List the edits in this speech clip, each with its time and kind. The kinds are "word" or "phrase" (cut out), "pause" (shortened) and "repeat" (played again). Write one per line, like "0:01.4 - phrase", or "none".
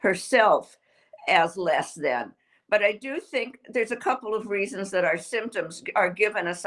none